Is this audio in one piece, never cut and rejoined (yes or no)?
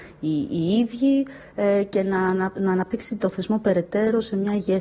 yes